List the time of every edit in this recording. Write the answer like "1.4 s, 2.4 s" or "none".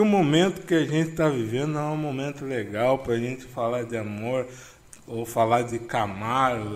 none